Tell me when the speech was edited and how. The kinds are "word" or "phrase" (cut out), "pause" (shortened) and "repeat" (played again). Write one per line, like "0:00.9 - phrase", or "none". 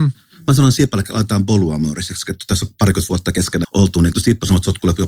0:03.6 - word
0:04.1 - word